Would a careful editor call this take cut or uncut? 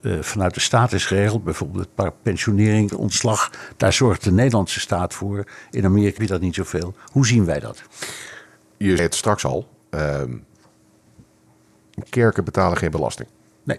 cut